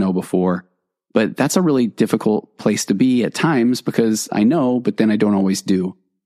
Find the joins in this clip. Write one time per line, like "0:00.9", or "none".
none